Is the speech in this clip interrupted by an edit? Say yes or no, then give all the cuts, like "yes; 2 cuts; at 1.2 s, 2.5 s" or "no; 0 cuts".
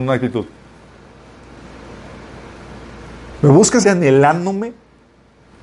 yes; 1 cut; at 3.8 s